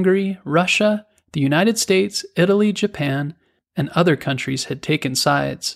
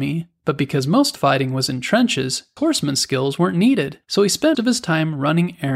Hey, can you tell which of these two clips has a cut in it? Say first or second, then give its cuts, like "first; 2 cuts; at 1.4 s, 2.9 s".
second; 4 cuts; at 1.2 s, 2.6 s, 4.0 s, 4.5 s